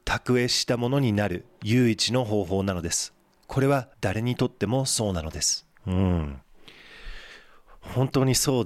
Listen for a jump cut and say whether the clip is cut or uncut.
cut